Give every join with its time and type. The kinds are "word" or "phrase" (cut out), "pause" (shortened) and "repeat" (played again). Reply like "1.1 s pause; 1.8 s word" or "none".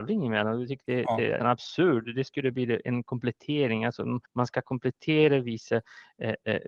1.4 s word; 4.3 s pause